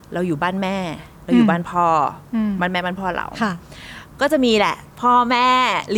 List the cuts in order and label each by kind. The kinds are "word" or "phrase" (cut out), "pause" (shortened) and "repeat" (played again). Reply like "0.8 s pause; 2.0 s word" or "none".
1.2 s pause; 4.9 s pause